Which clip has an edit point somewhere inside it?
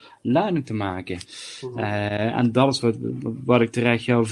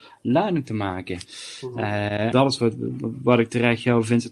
second; 1 cut; at 2.3 s

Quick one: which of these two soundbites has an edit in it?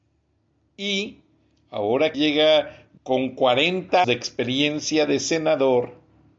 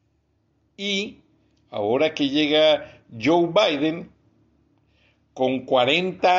first; 3 cuts; at 2.1 s, 3.0 s, 4.0 s

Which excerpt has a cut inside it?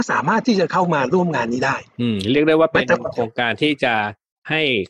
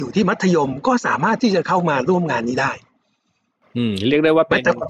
first; 1 cut; at 1.9 s

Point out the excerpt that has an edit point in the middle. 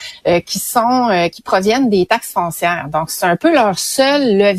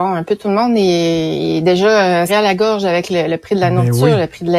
second; 1 cut; at 2.3 s

